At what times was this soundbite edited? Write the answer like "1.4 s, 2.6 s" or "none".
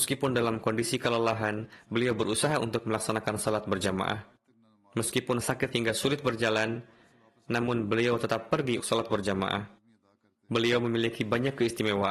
5.4 s, 5.7 s, 8.8 s